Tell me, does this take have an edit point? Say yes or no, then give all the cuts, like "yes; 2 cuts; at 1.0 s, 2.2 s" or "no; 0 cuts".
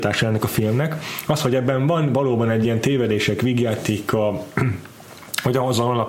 no; 0 cuts